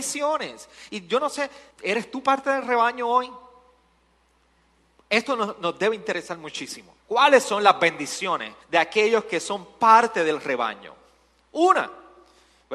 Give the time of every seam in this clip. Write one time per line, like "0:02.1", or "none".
0:01.7
0:07.0
0:08.6

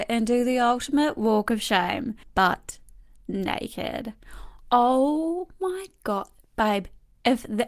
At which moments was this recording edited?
0:02.2

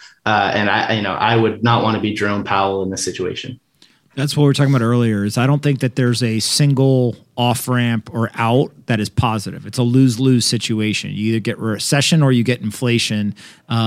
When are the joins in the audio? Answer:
none

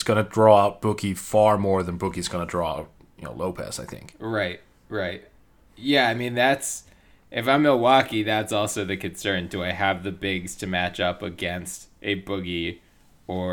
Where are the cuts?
none

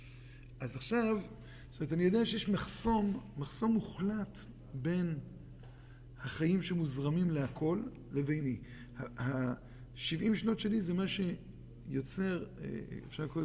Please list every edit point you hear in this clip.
none

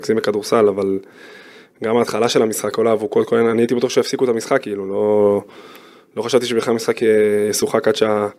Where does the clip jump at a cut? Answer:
none

